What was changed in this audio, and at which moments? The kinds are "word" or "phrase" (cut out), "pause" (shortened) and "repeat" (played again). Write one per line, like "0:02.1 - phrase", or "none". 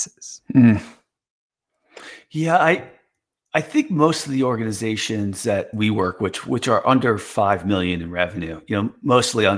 none